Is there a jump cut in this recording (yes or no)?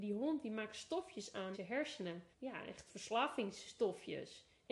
yes